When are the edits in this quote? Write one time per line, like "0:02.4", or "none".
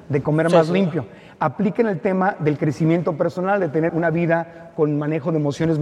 0:03.9